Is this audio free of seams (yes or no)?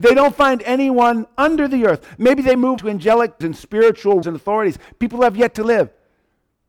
no